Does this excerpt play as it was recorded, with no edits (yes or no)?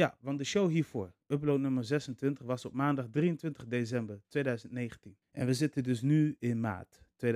no